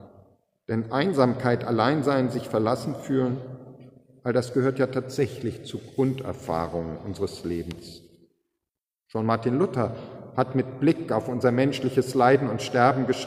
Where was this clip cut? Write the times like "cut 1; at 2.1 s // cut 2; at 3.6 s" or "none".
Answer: none